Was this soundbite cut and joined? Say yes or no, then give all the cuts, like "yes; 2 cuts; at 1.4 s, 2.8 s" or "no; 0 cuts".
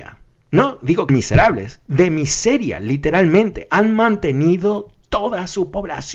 yes; 1 cut; at 1.1 s